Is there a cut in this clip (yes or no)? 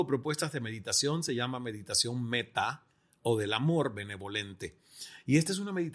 no